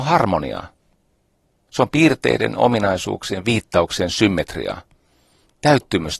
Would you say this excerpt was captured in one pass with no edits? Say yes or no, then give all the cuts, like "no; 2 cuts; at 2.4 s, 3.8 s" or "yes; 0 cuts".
yes; 0 cuts